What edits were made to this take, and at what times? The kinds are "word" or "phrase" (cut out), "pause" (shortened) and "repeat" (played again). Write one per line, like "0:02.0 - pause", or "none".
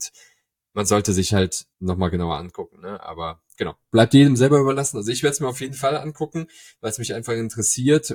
0:01.7 - pause